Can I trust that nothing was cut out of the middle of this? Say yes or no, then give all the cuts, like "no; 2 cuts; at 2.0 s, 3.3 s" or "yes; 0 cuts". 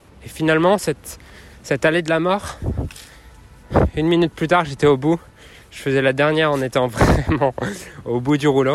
yes; 0 cuts